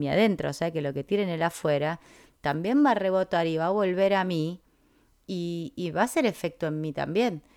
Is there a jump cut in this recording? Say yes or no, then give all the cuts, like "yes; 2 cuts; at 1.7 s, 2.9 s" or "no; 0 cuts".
no; 0 cuts